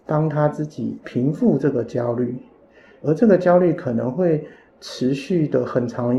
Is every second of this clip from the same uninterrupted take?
yes; 0 cuts

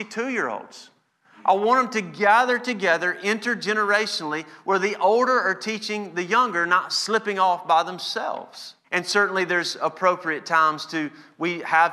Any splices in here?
yes; 1 cut; at 8.8 s

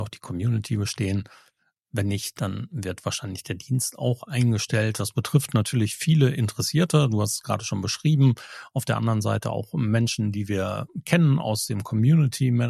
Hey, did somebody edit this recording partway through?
no; 0 cuts

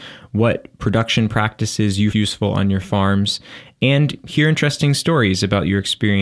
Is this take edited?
yes; 1 cut; at 2.1 s

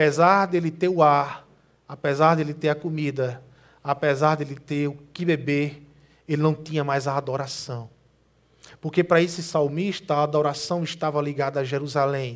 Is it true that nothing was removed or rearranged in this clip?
yes; 0 cuts

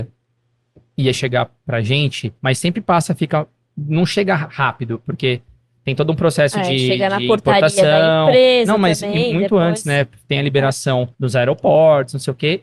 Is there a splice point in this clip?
yes; 3 cuts; at 1.6 s, 2.4 s, 11.1 s

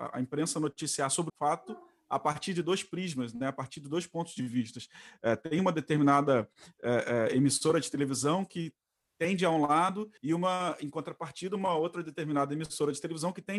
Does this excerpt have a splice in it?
yes; 2 cuts; at 1.3 s, 10.2 s

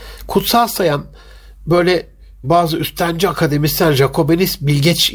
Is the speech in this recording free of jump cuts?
yes; 0 cuts

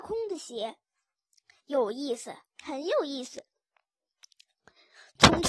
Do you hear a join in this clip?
no; 0 cuts

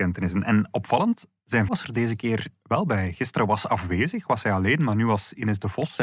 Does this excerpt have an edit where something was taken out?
yes; 1 cut; at 1.7 s

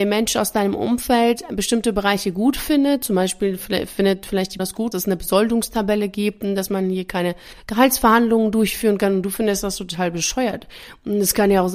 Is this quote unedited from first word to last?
no; 2 cuts; at 4.6 s, 4.9 s

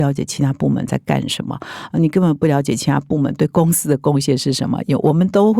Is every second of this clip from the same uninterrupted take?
yes; 0 cuts

